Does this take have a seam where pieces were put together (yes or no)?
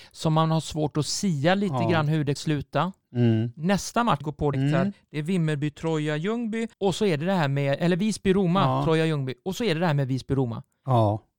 yes